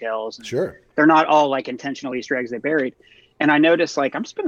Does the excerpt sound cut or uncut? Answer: uncut